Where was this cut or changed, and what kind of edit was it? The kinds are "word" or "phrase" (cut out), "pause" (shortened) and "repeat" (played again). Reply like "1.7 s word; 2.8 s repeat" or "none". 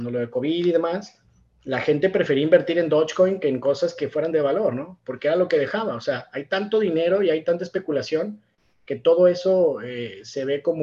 none